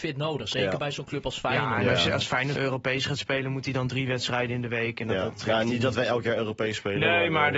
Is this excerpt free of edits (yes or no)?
no